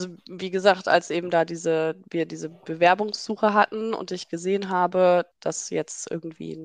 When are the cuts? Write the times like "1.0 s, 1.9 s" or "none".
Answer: 5.3 s